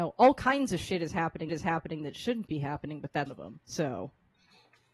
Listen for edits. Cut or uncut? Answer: cut